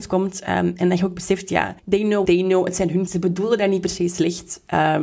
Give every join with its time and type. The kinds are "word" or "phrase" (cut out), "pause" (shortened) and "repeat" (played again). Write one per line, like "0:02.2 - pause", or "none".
0:01.8 - pause
0:02.2 - word
0:03.1 - word